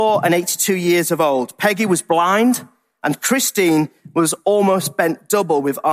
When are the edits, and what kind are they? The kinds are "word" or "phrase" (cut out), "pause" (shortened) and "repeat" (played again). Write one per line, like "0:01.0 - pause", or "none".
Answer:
none